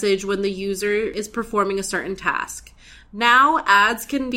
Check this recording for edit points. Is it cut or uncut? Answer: uncut